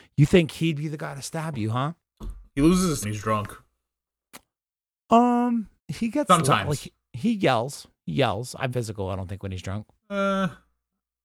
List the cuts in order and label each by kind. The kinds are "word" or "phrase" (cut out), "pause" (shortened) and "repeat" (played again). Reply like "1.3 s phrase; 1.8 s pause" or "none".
2.5 s pause; 3.0 s phrase; 5.8 s pause; 8.7 s phrase